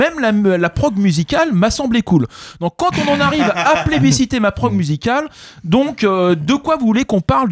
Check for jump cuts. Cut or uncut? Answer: uncut